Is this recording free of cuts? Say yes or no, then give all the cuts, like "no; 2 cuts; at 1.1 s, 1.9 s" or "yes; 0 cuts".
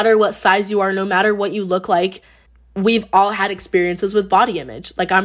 no; 1 cut; at 2.5 s